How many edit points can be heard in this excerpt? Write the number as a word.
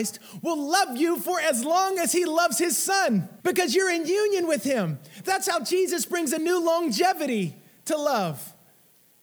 one